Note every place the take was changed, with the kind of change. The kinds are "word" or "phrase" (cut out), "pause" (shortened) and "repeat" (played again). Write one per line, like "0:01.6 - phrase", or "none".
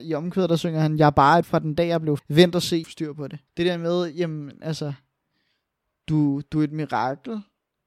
0:01.4 - word
0:02.2 - word
0:02.8 - phrase
0:03.5 - pause